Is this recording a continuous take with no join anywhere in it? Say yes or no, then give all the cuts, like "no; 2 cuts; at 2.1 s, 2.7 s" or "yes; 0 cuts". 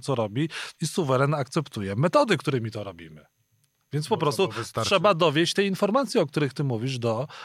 yes; 0 cuts